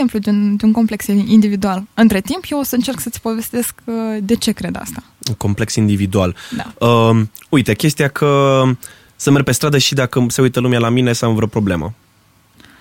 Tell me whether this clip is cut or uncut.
uncut